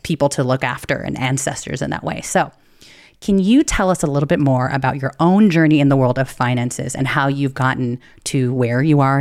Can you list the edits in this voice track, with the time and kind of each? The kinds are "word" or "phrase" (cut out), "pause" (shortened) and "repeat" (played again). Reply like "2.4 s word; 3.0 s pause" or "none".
none